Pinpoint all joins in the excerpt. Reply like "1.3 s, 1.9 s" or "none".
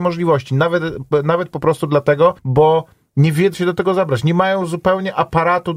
2.4 s, 3.5 s